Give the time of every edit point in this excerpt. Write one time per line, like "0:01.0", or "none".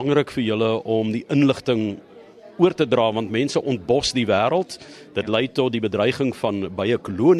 none